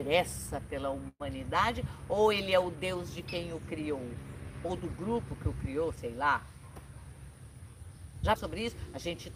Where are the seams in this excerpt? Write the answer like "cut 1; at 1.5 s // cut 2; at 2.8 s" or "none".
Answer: cut 1; at 8.4 s